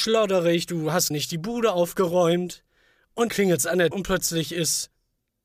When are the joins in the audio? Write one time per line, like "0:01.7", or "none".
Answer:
0:01.1
0:03.3
0:03.9